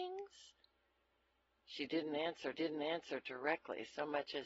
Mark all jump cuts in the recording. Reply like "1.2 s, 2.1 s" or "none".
2.5 s